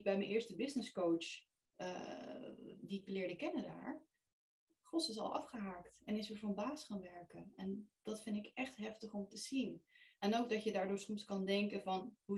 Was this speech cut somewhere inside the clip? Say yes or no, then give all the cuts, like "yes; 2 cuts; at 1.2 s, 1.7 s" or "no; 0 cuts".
no; 0 cuts